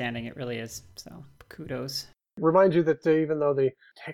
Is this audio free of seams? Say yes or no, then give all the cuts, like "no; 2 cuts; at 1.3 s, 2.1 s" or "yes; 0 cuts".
yes; 0 cuts